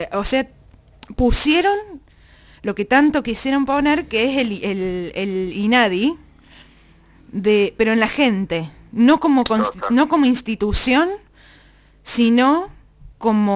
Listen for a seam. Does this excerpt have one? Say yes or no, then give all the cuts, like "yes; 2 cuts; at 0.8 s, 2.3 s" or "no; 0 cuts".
no; 0 cuts